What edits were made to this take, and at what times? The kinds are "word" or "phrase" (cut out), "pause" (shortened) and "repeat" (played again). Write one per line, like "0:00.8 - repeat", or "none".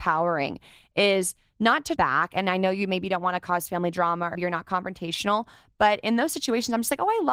0:02.0 - word
0:04.3 - word